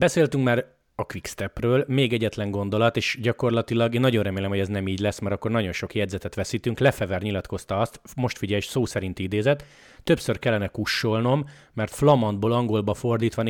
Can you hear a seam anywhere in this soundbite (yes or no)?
no